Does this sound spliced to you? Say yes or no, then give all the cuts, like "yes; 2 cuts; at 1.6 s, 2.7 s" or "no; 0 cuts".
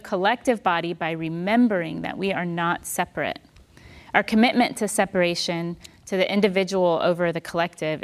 no; 0 cuts